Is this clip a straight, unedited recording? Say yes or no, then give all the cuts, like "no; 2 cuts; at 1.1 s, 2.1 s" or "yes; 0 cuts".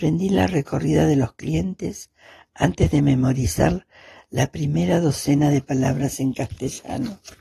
yes; 0 cuts